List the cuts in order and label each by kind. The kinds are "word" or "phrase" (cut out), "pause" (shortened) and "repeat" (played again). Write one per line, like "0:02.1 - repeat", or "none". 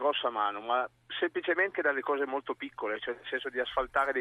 0:01.7 - word